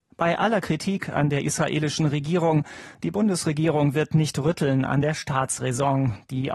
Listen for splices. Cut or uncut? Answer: uncut